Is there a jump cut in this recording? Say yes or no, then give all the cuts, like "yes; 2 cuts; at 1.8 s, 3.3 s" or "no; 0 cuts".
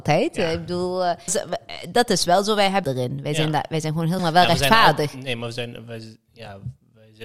yes; 3 cuts; at 1.3 s, 2.8 s, 4.2 s